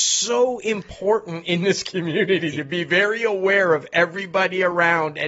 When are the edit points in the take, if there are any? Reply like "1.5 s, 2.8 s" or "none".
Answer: none